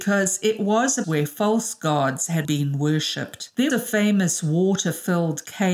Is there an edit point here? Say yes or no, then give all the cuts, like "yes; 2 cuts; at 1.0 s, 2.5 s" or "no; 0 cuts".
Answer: yes; 3 cuts; at 1.0 s, 2.4 s, 3.7 s